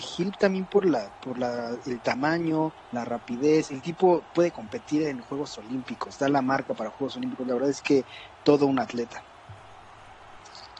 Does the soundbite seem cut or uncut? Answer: cut